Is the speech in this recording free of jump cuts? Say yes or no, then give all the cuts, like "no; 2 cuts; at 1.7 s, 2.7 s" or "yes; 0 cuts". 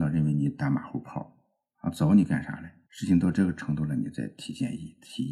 yes; 0 cuts